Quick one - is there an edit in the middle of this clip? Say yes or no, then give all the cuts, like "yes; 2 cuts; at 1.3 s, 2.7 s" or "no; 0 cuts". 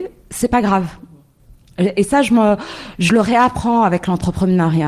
no; 0 cuts